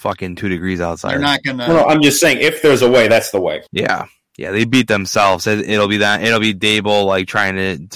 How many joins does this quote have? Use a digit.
1